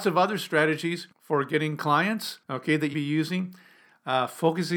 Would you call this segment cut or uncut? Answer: cut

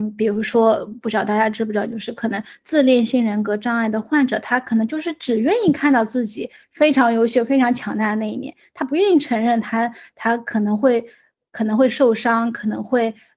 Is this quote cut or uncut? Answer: uncut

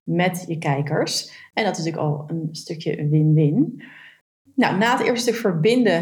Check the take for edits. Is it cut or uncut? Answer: uncut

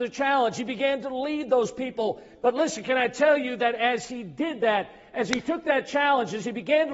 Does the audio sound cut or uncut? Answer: uncut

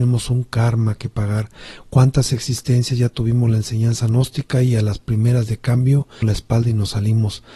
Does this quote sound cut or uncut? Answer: cut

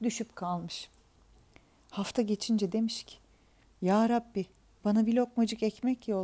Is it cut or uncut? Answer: uncut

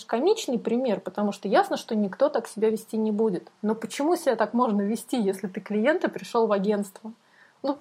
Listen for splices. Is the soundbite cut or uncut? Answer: uncut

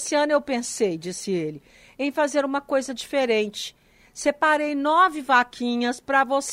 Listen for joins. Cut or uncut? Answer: uncut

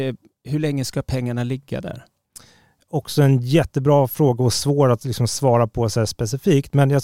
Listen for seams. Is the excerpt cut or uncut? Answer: uncut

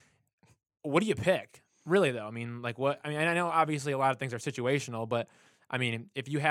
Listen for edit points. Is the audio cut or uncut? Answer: uncut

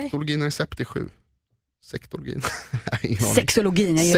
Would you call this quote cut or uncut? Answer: uncut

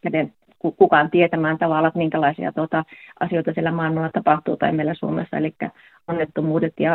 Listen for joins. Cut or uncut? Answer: uncut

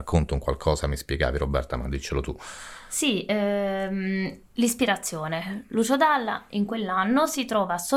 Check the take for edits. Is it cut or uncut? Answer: uncut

